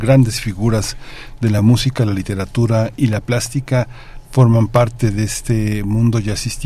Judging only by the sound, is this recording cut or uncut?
uncut